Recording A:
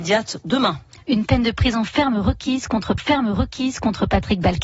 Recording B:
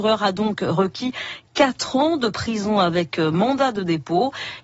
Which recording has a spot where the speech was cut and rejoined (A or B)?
A